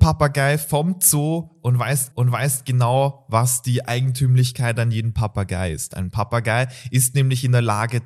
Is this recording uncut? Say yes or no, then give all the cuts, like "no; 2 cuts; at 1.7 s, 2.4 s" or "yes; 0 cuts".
no; 1 cut; at 2.1 s